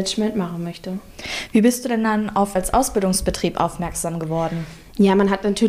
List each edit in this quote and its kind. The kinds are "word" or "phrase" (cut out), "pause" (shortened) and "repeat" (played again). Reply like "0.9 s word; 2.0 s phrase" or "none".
2.6 s word